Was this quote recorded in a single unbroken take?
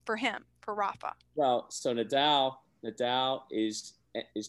yes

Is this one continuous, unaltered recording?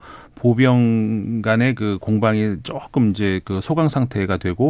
yes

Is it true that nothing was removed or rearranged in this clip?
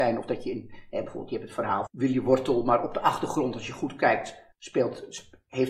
no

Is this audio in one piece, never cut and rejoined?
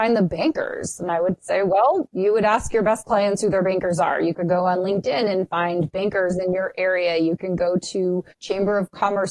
no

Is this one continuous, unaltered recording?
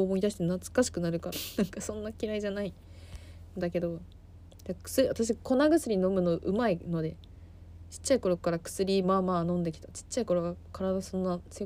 no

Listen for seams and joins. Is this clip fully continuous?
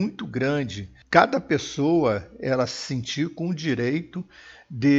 yes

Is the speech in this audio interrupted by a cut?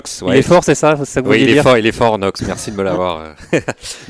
no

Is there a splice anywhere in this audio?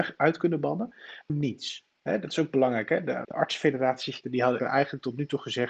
yes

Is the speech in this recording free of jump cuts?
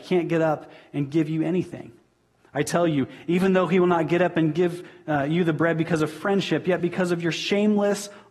yes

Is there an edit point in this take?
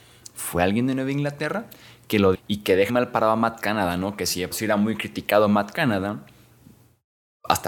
yes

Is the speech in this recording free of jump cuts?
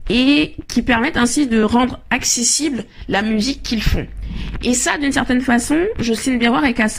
yes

